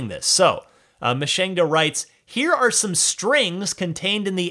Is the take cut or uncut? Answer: uncut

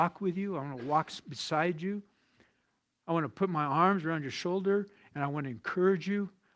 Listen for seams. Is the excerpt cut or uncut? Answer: uncut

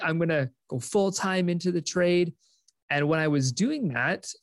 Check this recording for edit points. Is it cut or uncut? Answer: uncut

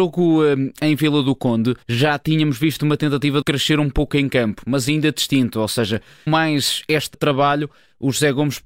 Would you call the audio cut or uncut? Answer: cut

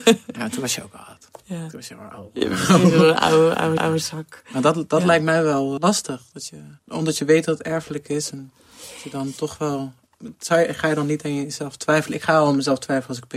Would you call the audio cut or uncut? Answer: cut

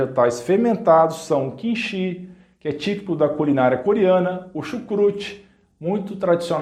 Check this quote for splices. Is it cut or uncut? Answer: uncut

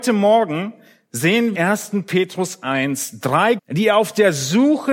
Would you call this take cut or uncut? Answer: cut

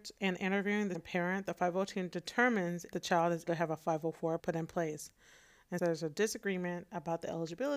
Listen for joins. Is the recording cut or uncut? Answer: cut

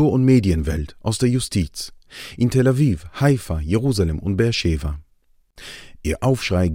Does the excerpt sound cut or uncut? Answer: uncut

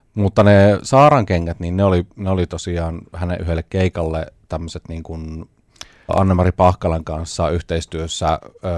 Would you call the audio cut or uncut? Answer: cut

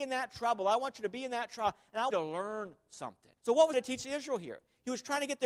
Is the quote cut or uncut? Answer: cut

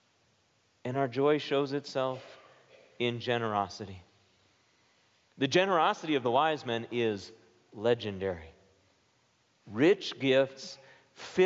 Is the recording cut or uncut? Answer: uncut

